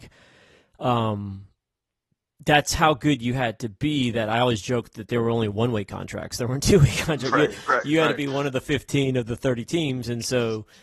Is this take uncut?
yes; 0 cuts

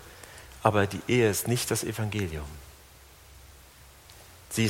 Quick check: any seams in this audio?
no; 0 cuts

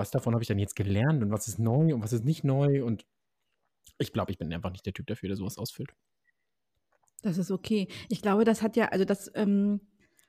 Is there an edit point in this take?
no; 0 cuts

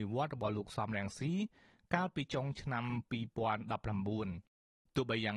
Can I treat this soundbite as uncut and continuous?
yes; 0 cuts

